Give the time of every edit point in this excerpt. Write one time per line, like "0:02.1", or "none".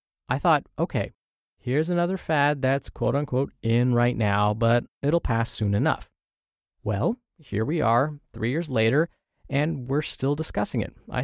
none

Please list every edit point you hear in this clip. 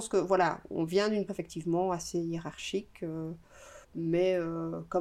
0:01.3
0:03.8

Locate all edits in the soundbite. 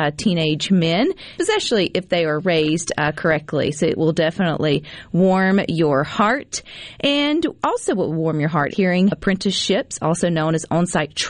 0:01.4
0:08.7
0:09.1

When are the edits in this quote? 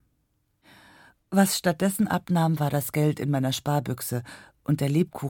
none

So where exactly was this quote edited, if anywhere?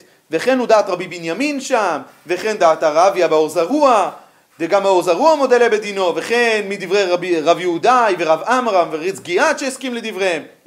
none

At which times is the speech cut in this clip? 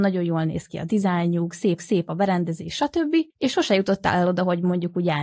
0:01.8
0:03.3

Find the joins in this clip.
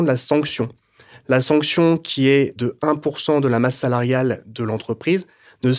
none

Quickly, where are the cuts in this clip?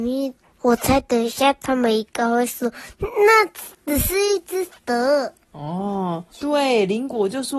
0:06.3

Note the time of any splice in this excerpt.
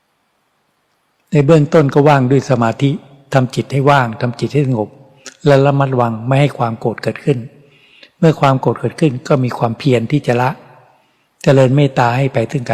none

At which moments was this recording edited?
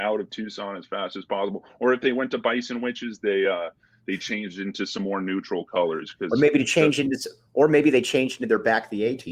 none

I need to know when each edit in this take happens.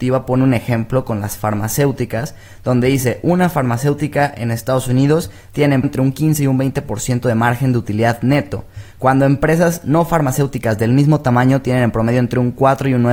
0:05.8

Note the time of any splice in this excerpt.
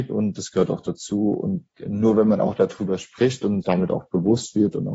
0:03.6

